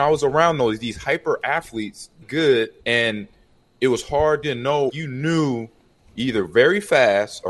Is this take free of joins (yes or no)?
no